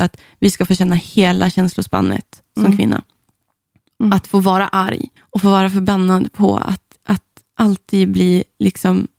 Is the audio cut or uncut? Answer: cut